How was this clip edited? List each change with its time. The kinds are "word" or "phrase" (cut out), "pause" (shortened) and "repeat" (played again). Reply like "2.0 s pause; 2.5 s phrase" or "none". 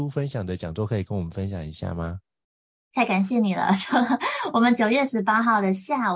none